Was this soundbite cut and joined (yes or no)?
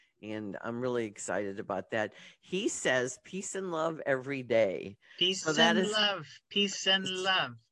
no